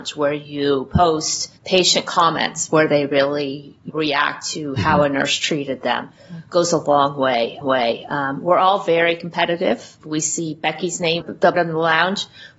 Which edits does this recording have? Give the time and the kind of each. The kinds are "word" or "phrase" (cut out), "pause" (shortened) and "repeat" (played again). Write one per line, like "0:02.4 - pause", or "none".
0:01.6 - pause
0:03.9 - word
0:07.6 - repeat
0:10.0 - word
0:11.2 - phrase
0:11.5 - word